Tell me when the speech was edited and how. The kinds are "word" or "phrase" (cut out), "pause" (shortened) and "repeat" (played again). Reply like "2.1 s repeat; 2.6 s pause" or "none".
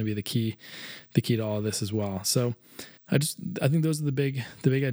3.0 s pause